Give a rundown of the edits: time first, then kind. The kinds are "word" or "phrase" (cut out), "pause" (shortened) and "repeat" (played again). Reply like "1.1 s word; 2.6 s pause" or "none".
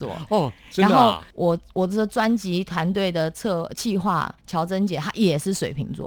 1.3 s pause; 4.4 s pause